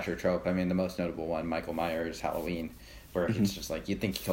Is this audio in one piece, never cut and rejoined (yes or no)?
yes